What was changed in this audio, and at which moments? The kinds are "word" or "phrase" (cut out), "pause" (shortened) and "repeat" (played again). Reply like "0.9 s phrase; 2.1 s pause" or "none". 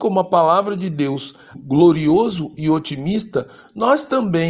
1.5 s phrase